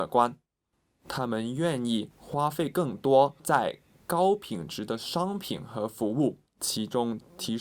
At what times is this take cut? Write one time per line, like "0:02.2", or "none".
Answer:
0:06.5